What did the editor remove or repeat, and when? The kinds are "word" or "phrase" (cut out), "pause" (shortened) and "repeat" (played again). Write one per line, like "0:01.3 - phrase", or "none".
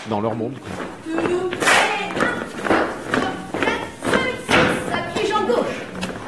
none